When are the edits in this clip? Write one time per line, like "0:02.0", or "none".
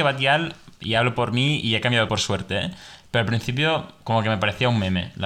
0:02.1

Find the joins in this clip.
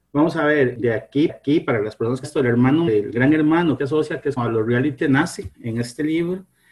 0:01.3
0:02.2
0:02.9
0:03.8
0:04.4
0:05.0
0:05.5

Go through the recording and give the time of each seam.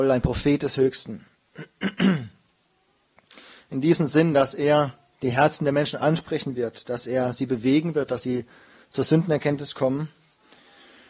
none

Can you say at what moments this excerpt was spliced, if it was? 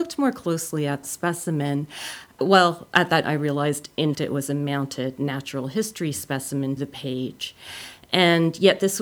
0:01.0
0:02.4
0:03.2
0:04.1
0:06.8

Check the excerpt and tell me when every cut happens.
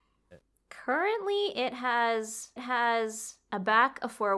0:02.6

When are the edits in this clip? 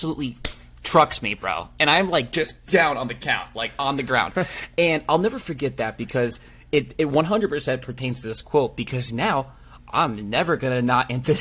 none

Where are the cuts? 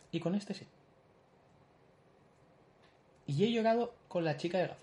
none

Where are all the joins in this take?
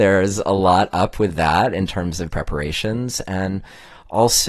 0:02.3

